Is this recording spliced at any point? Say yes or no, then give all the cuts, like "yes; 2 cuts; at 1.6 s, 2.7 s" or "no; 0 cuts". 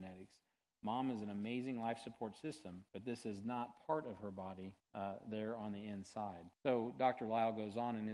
yes; 3 cuts; at 2.9 s, 4.8 s, 6.5 s